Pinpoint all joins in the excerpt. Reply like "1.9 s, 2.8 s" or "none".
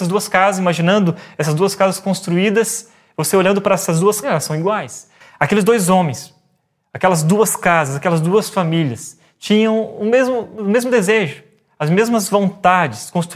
4.2 s